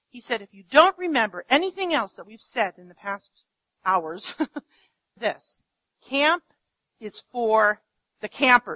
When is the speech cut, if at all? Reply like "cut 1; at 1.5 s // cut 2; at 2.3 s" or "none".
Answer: cut 1; at 5.2 s